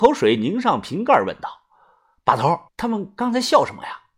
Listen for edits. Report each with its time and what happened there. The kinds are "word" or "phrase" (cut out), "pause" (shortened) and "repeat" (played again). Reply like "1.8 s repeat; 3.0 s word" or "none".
2.7 s pause